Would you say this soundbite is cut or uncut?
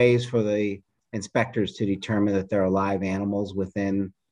uncut